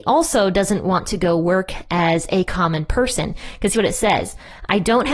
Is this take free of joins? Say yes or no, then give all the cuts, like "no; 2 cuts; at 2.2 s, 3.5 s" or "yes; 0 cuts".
no; 1 cut; at 3.7 s